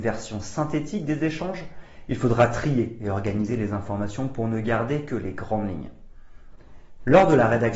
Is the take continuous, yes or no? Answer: yes